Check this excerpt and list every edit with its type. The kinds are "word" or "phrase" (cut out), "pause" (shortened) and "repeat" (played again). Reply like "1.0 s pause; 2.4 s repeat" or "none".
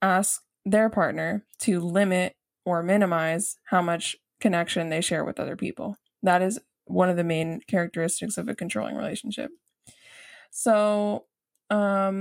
none